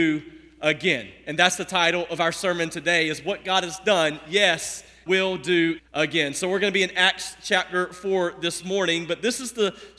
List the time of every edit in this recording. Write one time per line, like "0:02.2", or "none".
0:05.1
0:05.8